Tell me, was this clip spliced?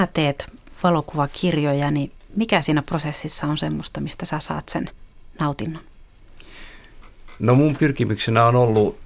no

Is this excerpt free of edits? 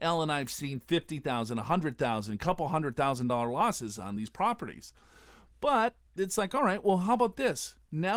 yes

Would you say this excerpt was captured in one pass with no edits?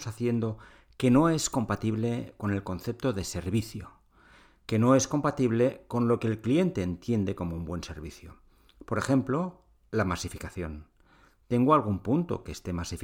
yes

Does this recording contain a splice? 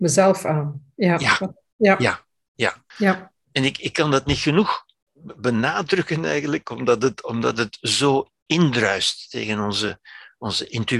yes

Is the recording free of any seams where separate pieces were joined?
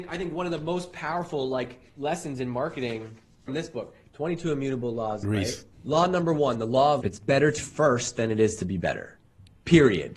no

